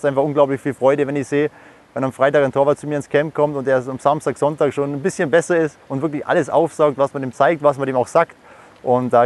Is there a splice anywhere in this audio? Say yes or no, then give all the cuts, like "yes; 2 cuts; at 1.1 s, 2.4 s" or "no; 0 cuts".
yes; 1 cut; at 5.8 s